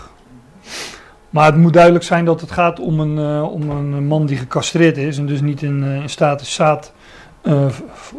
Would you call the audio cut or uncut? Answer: uncut